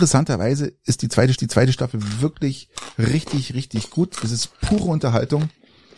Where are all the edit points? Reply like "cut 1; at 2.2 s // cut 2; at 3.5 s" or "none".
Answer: cut 1; at 1.4 s